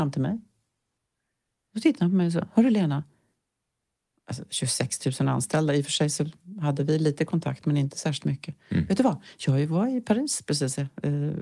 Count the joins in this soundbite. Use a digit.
0